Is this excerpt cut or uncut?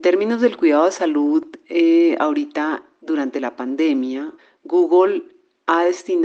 cut